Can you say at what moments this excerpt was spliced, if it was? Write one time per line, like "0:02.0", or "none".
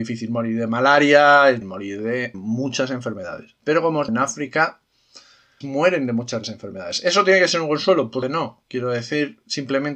0:01.6
0:02.3
0:04.1
0:05.6
0:06.4
0:08.2